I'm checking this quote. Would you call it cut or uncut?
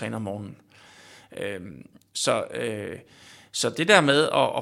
uncut